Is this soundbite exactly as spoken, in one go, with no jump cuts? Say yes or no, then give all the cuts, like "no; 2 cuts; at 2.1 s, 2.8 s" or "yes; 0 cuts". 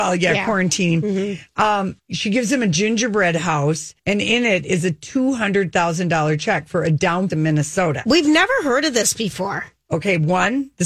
no; 3 cuts; at 2.0 s, 4.0 s, 7.3 s